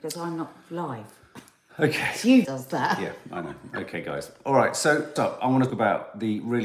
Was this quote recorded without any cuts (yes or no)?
no